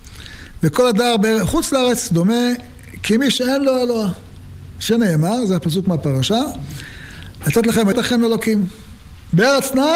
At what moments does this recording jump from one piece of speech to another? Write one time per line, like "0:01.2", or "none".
0:07.9